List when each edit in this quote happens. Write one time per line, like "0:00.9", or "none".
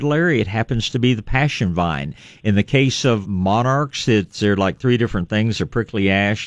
0:03.2